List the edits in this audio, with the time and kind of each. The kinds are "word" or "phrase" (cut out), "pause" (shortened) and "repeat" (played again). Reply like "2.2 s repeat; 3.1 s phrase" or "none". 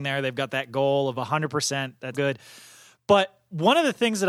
1.1 s word; 2.1 s word